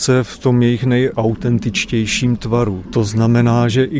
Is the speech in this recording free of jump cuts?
yes; 0 cuts

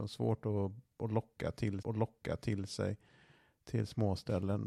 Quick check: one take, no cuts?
no; 1 cut; at 1.8 s

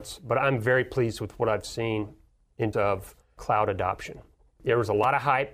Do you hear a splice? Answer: yes; 1 cut; at 2.7 s

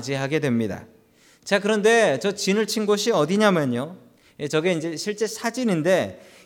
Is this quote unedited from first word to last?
yes; 0 cuts

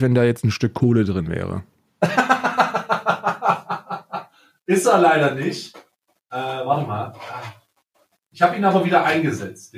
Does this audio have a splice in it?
no; 0 cuts

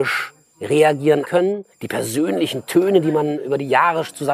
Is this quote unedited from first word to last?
no; 2 cuts; at 1.2 s, 1.7 s

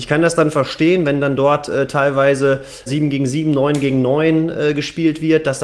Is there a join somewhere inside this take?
yes; 1 cut; at 2.9 s

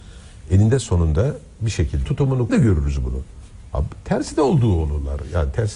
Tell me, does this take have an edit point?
yes; 2 cuts; at 2.0 s, 2.5 s

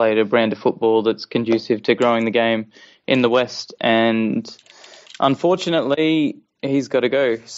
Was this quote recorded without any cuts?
yes; 0 cuts

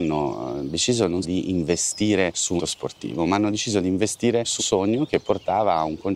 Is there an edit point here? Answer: yes; 3 cuts; at 1.2 s, 2.6 s, 4.6 s

